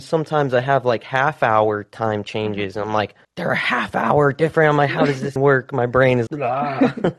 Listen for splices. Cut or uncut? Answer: cut